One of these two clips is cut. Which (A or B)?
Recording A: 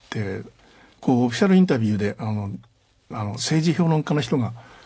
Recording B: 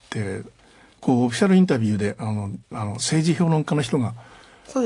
B